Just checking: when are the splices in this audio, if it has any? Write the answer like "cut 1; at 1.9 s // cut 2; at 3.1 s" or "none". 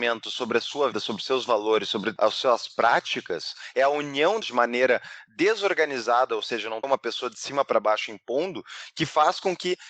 cut 1; at 0.9 s // cut 2; at 2.2 s // cut 3; at 4.4 s // cut 4; at 6.8 s